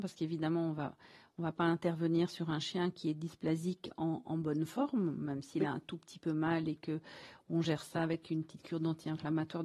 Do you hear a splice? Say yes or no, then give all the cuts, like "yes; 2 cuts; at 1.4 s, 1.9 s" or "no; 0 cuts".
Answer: no; 0 cuts